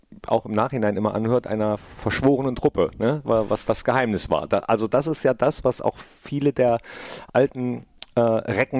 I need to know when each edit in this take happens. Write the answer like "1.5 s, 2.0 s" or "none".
none